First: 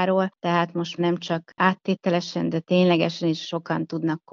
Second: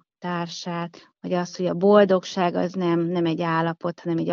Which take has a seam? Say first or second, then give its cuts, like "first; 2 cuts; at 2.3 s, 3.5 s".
first; 1 cut; at 1.0 s